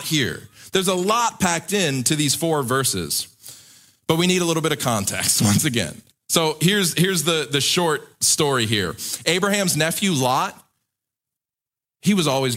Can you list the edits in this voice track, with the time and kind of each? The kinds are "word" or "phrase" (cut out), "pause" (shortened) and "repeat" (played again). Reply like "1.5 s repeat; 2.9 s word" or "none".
none